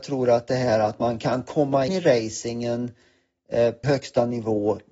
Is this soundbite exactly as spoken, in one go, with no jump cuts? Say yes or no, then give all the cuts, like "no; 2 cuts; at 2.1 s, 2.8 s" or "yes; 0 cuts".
no; 2 cuts; at 1.9 s, 3.8 s